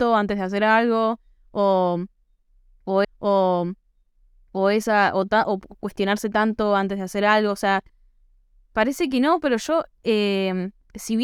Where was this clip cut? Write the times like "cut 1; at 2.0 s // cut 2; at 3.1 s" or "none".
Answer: cut 1; at 3.0 s